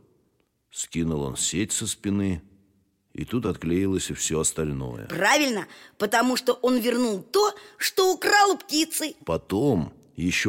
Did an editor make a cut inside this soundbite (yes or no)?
no